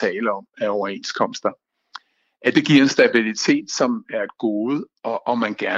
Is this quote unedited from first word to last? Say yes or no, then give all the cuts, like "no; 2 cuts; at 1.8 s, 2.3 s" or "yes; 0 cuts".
yes; 0 cuts